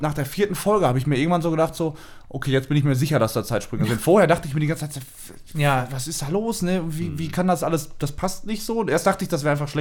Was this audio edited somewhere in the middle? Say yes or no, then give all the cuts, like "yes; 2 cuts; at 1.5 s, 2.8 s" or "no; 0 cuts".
no; 0 cuts